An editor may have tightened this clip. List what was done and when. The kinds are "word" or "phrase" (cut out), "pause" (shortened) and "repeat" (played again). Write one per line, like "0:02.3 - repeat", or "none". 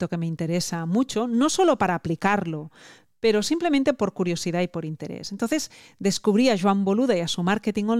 none

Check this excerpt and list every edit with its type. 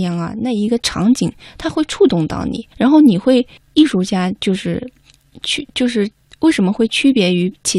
0:02.7 - pause
0:03.6 - pause
0:06.2 - pause

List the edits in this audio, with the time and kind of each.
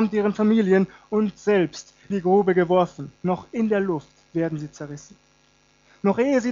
0:02.1 - word
0:03.2 - pause
0:04.3 - pause

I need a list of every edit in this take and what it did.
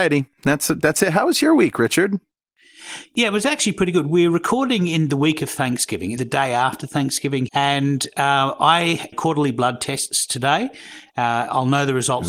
0:06.2 - word
0:07.5 - word
0:09.1 - phrase

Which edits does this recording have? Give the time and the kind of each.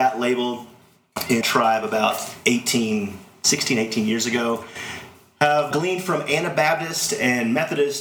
0:01.4 - word
0:05.7 - word

